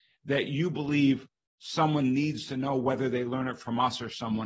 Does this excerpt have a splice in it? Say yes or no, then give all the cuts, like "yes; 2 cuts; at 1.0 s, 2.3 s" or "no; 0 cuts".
no; 0 cuts